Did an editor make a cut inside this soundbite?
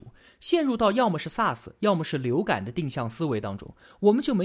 no; 0 cuts

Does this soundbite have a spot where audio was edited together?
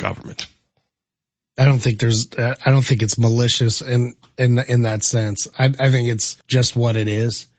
yes; 1 cut; at 6.4 s

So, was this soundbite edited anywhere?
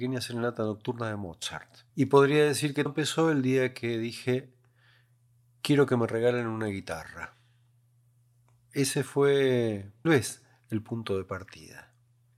yes; 3 cuts; at 1.9 s, 2.9 s, 10.0 s

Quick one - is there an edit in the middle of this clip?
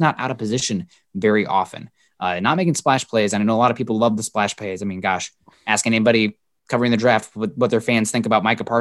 no; 0 cuts

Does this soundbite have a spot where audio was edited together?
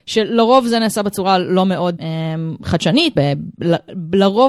yes; 2 cuts; at 2.0 s, 3.2 s

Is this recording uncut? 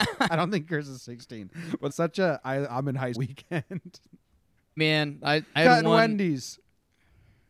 no; 4 cuts; at 1.9 s, 3.1 s, 4.8 s, 5.6 s

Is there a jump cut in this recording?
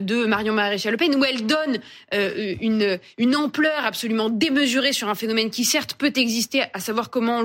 no; 0 cuts

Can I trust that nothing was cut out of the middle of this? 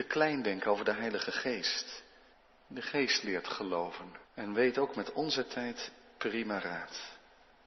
no; 2 cuts; at 2.3 s, 4.2 s

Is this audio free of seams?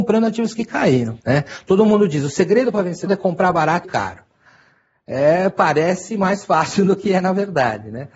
no; 3 cuts; at 1.2 s, 3.1 s, 3.8 s

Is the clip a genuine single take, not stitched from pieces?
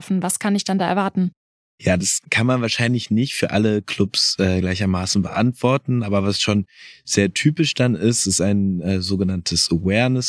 yes; 0 cuts

